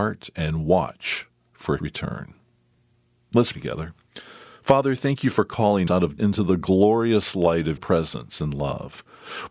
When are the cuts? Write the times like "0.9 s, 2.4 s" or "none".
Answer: 1.8 s, 3.5 s, 5.9 s, 6.2 s, 7.8 s